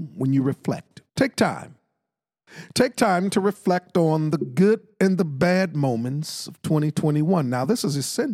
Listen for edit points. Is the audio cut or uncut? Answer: cut